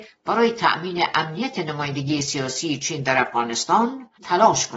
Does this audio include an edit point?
no; 0 cuts

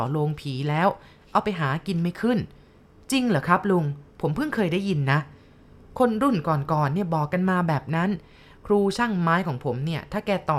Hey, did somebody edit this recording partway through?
no; 0 cuts

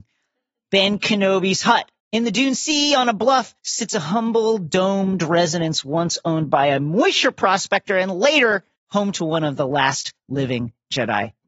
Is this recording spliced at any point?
yes; 3 cuts; at 2.0 s, 3.6 s, 8.8 s

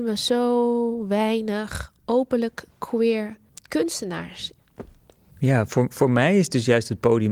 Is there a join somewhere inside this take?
yes; 1 cut; at 3.5 s

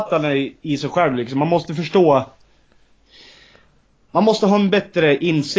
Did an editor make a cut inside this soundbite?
no; 0 cuts

